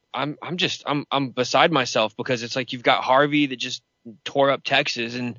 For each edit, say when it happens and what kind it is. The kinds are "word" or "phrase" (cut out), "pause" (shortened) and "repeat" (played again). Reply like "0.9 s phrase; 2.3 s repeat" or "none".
none